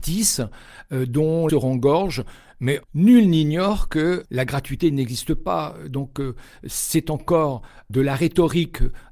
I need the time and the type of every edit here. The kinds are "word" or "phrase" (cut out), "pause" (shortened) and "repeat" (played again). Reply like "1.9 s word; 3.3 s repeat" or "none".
1.5 s phrase; 2.8 s pause; 4.2 s word